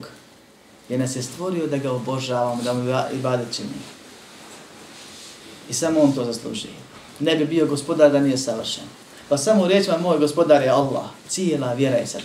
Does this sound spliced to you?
yes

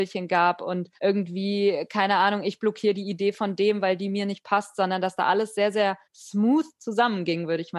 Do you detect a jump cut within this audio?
yes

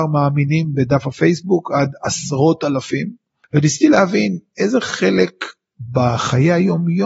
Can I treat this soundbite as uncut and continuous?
yes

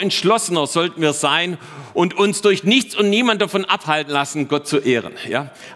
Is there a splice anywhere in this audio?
no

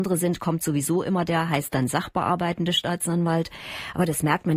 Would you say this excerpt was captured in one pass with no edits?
yes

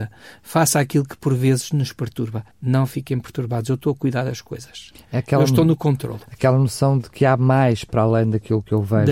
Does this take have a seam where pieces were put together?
yes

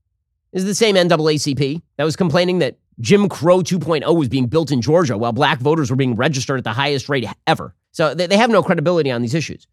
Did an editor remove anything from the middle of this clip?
yes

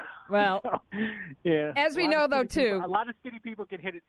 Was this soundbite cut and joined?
no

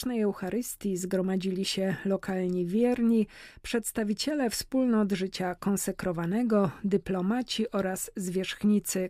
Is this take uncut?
yes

